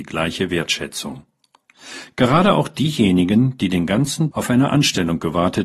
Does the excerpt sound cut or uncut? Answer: cut